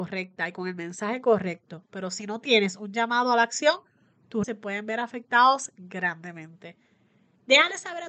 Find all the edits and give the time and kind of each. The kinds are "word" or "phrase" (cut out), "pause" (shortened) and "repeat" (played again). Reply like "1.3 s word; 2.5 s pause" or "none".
4.4 s word